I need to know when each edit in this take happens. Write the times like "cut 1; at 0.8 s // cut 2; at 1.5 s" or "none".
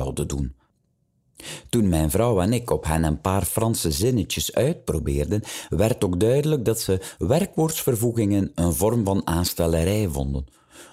none